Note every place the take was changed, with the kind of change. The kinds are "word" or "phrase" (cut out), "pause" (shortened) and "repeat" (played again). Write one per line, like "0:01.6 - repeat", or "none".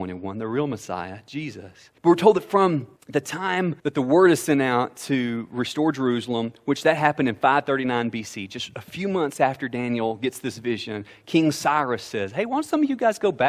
0:02.0 - pause
0:03.0 - pause
0:03.8 - pause